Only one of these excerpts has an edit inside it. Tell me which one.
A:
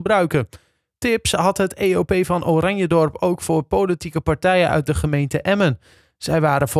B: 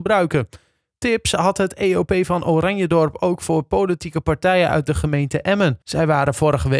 B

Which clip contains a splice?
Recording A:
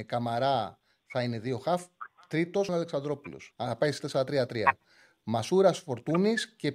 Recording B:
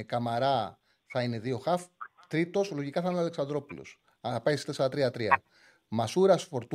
A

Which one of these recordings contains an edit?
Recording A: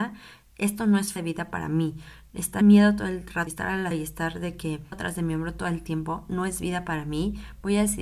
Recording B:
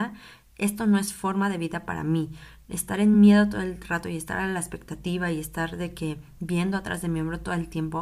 A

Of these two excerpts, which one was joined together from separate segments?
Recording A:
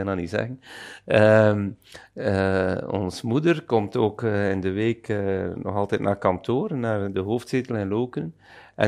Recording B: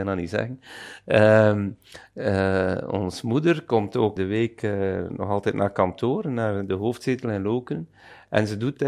B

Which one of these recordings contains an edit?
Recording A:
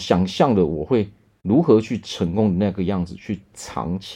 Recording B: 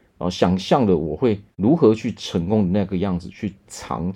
B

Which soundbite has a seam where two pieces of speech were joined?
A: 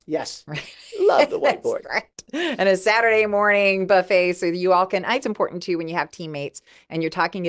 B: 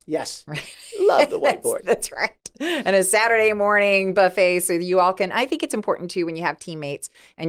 A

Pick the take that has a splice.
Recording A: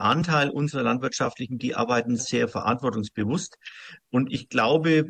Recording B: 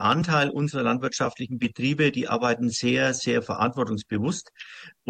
A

